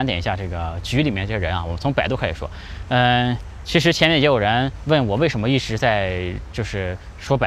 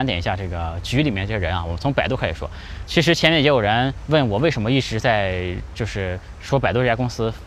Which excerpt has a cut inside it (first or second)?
second